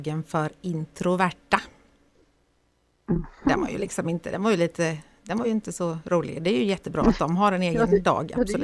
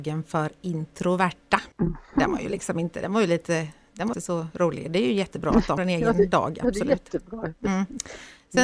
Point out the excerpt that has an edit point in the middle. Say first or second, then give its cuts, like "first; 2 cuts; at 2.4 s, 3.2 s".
second; 3 cuts; at 1.7 s, 4.1 s, 5.8 s